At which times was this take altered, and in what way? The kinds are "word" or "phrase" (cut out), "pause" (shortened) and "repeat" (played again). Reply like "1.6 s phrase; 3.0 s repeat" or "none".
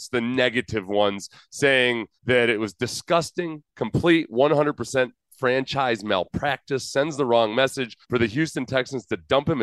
2.2 s pause; 8.0 s pause

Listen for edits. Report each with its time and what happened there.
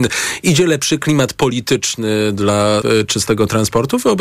2.8 s word

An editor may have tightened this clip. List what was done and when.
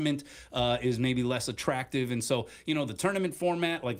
none

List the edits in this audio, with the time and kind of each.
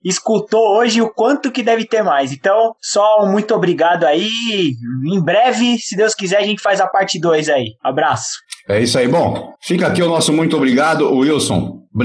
9.5 s pause

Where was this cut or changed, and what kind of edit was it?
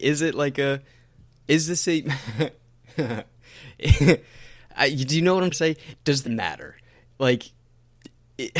5.5 s word; 6.2 s word

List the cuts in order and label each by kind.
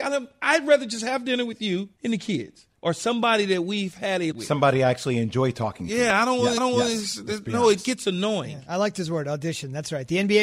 1.9 s pause; 2.8 s pause; 4.3 s phrase; 6.6 s repeat

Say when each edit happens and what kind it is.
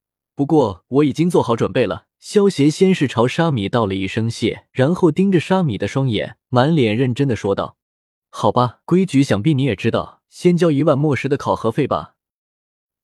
2.1 s pause; 4.7 s pause; 6.4 s pause; 7.8 s pause; 8.8 s pause; 10.2 s pause

